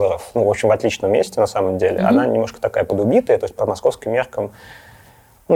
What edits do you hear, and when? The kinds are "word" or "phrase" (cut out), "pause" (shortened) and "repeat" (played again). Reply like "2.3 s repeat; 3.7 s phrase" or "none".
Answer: none